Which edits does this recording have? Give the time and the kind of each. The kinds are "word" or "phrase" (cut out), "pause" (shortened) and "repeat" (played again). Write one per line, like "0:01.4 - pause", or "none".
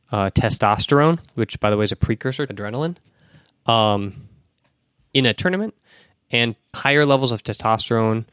0:01.3 - pause
0:02.5 - word
0:05.4 - word
0:06.7 - word